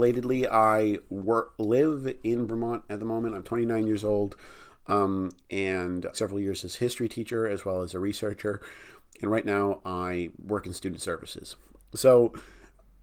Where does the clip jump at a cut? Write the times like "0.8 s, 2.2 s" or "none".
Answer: 2.5 s, 6.1 s